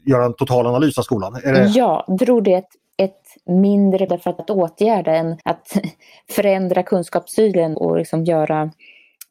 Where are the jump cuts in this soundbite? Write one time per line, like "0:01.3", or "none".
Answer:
0:02.2
0:04.1
0:04.4
0:05.4
0:07.7